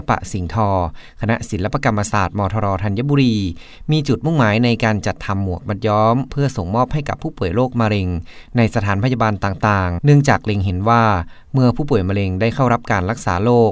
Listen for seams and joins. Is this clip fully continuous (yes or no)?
no